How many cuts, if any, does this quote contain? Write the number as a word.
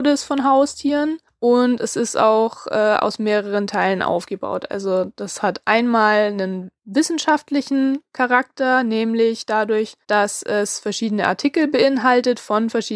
three